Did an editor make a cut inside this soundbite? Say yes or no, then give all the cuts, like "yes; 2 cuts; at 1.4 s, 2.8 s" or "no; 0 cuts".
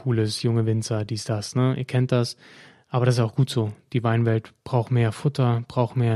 no; 0 cuts